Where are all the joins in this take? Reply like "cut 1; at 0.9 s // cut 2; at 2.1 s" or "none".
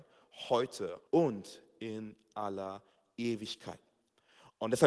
cut 1; at 1.1 s